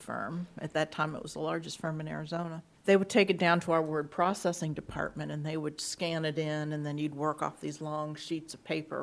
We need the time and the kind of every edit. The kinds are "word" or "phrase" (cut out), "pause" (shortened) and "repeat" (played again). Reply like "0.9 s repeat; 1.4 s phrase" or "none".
2.8 s pause